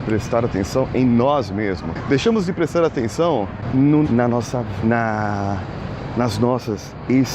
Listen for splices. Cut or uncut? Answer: cut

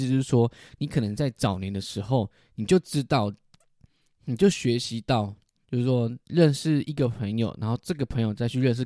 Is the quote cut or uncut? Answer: uncut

